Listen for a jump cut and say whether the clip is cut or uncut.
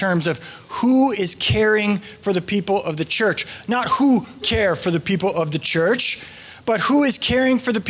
cut